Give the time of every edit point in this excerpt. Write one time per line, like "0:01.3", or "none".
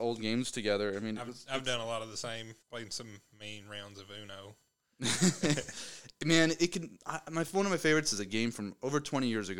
0:02.6